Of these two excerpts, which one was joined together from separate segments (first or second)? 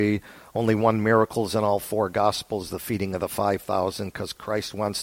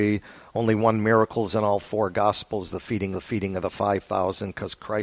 second